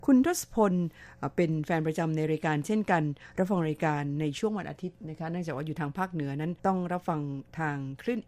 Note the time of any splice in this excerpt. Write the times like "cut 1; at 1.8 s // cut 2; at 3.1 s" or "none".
cut 1; at 6.6 s